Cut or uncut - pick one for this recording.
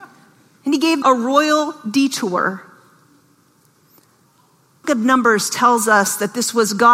cut